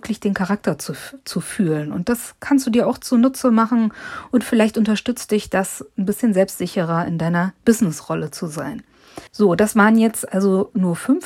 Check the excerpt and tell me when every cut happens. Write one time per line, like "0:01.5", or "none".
0:09.3